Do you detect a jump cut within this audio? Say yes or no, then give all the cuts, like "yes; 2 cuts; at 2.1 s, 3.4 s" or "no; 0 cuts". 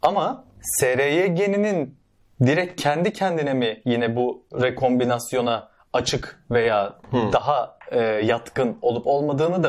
no; 0 cuts